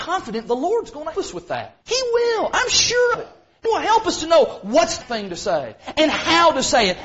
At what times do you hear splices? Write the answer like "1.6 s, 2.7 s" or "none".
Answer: 1.1 s, 1.8 s, 3.1 s, 3.7 s, 5.0 s